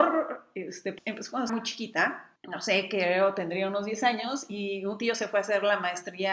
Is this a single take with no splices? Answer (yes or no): no